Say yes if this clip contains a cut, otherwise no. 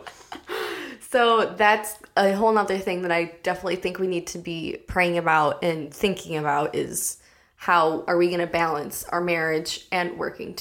no